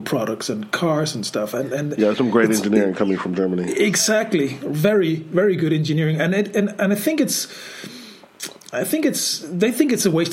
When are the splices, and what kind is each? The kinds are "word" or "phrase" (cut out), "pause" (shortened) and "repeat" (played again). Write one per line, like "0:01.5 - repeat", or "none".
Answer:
none